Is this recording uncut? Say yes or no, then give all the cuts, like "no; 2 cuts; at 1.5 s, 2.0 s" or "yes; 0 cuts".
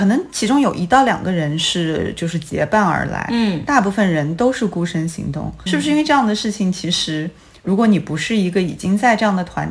no; 1 cut; at 5.7 s